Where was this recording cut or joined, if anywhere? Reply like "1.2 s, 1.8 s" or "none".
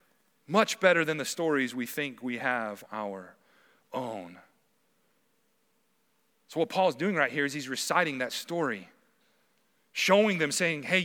2.9 s